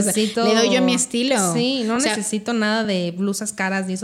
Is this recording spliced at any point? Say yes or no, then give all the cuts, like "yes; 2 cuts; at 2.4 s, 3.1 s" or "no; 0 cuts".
no; 0 cuts